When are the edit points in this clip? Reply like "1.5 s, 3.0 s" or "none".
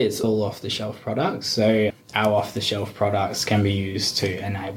none

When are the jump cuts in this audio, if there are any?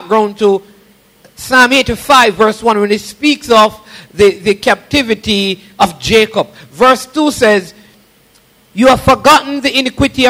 none

